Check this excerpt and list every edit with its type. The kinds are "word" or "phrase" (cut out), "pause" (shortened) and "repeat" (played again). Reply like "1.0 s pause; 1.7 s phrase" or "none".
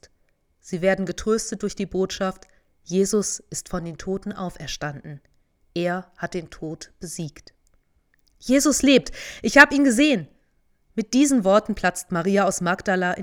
none